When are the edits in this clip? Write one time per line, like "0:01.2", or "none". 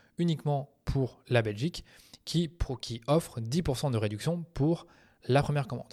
none